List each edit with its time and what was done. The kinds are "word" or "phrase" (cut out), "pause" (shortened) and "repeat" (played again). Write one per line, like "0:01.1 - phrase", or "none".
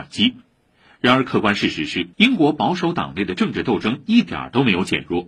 0:02.1 - pause